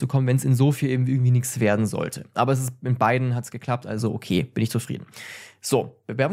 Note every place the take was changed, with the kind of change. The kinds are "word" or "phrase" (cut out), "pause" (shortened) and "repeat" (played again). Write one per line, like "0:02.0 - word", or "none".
none